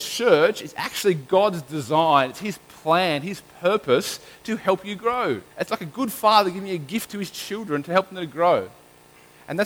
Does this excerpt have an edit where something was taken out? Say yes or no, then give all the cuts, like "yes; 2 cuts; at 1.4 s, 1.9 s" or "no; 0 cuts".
yes; 1 cut; at 5.5 s